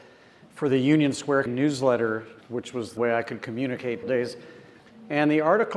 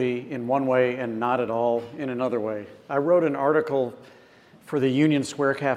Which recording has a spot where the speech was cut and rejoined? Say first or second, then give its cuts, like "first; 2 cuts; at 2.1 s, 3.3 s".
first; 4 cuts; at 1.5 s, 2.4 s, 3.0 s, 4.0 s